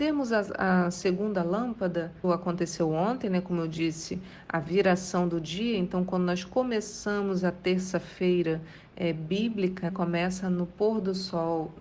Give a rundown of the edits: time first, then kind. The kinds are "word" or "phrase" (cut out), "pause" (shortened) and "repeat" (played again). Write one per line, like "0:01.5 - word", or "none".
0:02.2 - phrase
0:09.9 - word